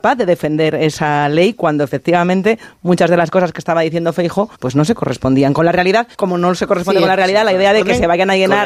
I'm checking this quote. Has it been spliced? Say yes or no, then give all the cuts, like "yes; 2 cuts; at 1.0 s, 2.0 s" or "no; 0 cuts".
yes; 2 cuts; at 4.5 s, 6.1 s